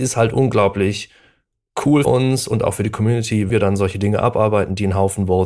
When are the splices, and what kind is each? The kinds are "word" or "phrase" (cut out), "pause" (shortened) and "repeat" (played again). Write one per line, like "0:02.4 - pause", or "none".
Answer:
0:02.0 - word
0:03.5 - word